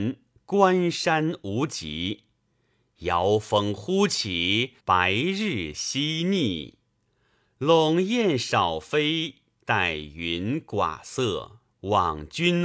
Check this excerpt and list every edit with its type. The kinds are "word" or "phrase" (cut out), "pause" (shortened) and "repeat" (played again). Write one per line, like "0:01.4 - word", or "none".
0:04.8 - pause
0:11.6 - pause